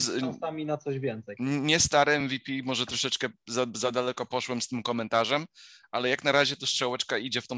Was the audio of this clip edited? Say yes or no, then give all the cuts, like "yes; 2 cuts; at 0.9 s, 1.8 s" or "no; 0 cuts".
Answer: no; 0 cuts